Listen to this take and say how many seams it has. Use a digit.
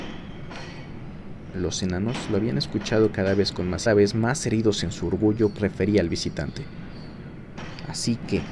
2